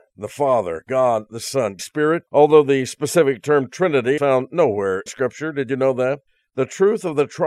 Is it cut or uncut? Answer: cut